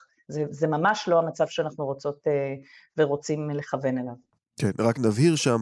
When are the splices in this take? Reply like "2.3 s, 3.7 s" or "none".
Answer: none